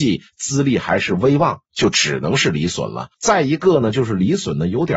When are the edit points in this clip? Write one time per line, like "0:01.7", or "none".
0:01.6
0:03.1